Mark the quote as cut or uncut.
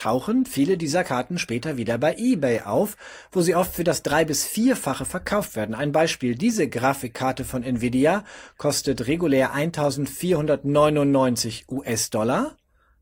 uncut